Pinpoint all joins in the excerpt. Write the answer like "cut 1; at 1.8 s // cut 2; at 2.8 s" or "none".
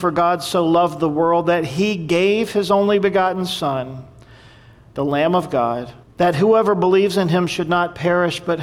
cut 1; at 6.0 s